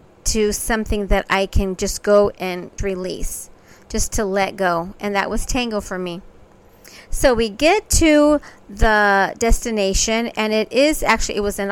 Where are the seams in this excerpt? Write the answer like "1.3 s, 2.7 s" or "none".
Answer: 2.3 s, 2.8 s